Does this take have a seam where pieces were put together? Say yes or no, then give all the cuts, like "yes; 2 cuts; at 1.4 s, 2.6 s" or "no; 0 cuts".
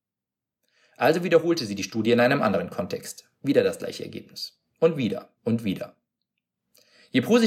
yes; 1 cut; at 5.4 s